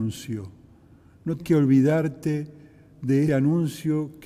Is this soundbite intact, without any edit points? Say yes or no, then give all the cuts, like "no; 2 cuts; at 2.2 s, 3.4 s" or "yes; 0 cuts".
no; 2 cuts; at 1.4 s, 3.3 s